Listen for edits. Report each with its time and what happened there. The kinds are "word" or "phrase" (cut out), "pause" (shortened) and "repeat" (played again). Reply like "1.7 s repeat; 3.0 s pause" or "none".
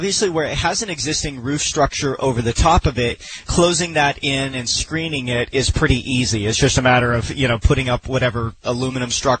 3.5 s word